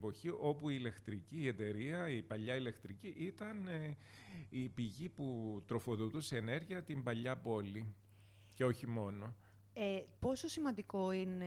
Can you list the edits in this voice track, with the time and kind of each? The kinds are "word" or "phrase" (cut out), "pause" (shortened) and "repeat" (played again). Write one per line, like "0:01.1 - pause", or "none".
0:10.2 - pause